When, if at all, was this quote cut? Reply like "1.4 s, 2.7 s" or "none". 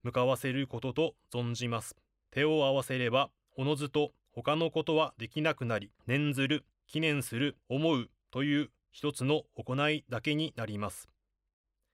2.2 s, 6.0 s, 6.7 s, 7.6 s